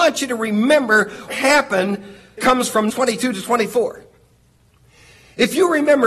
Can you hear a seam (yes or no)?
yes